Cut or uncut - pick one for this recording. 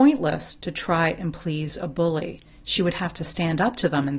uncut